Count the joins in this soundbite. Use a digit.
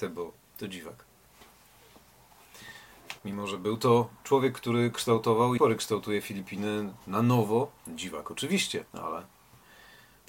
4